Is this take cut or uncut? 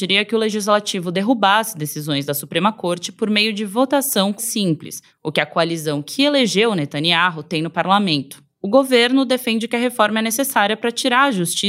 cut